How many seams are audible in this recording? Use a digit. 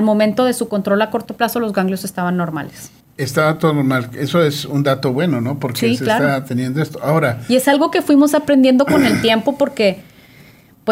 1